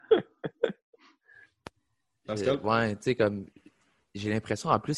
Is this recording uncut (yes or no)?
yes